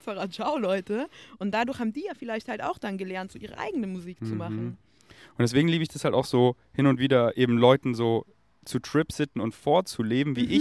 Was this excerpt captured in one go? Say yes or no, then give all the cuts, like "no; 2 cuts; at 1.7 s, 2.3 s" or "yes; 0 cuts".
yes; 0 cuts